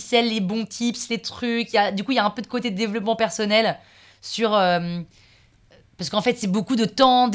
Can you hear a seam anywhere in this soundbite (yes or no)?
no